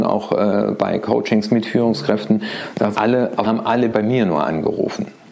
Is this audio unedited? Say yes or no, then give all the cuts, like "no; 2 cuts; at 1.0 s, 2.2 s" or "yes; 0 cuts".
no; 3 cuts; at 2.9 s, 3.5 s, 3.9 s